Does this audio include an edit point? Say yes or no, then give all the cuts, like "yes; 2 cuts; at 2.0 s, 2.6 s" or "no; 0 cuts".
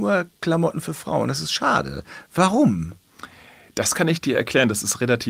no; 0 cuts